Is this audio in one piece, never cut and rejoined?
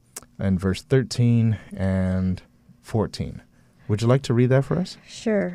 yes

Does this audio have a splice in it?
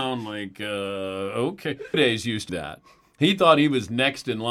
yes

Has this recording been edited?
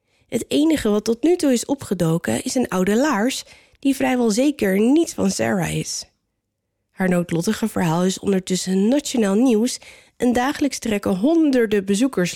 no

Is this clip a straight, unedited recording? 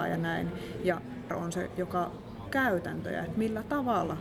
no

